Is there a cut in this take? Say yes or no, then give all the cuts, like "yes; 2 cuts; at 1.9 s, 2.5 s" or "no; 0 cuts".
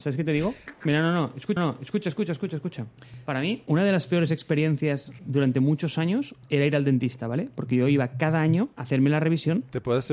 yes; 2 cuts; at 1.6 s, 5.2 s